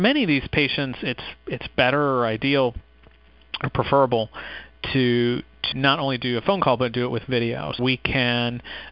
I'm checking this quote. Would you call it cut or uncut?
cut